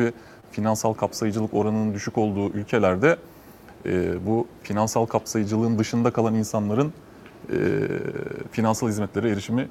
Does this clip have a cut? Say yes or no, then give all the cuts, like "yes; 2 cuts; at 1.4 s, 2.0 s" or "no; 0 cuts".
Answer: no; 0 cuts